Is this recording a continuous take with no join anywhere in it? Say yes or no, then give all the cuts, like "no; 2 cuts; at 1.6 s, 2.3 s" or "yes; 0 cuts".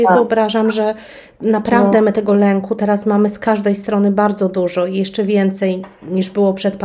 yes; 0 cuts